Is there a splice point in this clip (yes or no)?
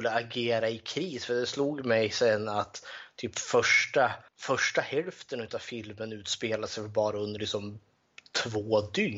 yes